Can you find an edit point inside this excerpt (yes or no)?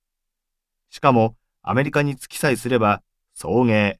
no